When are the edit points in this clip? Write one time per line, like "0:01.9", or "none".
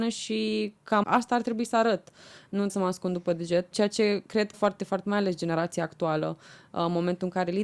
0:01.0
0:02.7
0:03.7
0:04.5
0:05.0